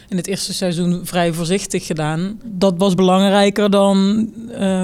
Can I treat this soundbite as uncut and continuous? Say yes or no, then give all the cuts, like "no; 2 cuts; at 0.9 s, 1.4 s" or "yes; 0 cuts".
yes; 0 cuts